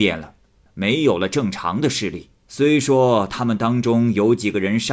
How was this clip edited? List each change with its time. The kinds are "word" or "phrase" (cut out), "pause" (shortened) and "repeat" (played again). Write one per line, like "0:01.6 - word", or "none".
0:02.4 - pause